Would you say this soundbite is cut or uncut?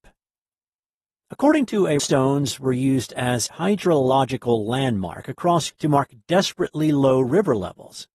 cut